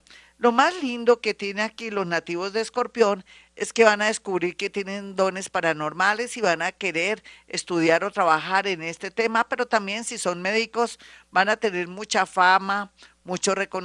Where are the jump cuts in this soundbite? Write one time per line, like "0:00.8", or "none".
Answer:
none